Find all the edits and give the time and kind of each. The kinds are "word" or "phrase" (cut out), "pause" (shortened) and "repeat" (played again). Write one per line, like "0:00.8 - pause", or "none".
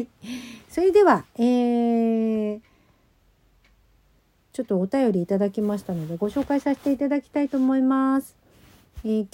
none

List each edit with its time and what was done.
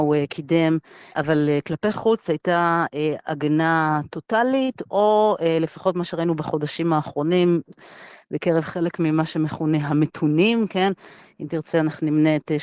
none

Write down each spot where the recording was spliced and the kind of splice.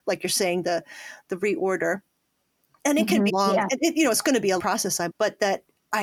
0:03.3 - word
0:04.6 - word
0:05.1 - word

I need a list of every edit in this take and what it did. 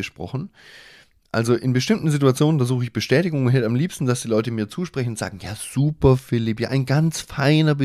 none

